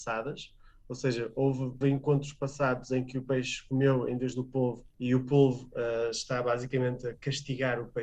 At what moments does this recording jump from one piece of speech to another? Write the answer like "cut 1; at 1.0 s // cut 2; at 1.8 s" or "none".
cut 1; at 1.8 s // cut 2; at 4.9 s